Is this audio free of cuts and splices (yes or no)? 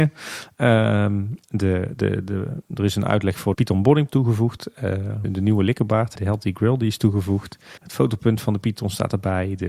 no